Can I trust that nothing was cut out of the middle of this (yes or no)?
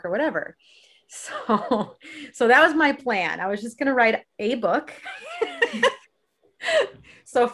yes